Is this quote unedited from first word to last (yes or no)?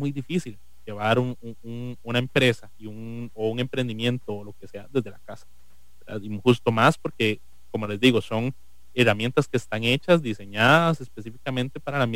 yes